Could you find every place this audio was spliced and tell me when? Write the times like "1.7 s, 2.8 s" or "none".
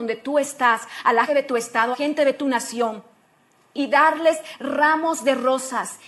1.3 s, 1.9 s, 3.7 s